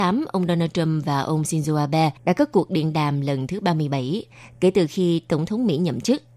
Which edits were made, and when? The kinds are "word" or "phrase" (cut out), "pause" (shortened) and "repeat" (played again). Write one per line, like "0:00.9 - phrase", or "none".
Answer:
0:02.2 - pause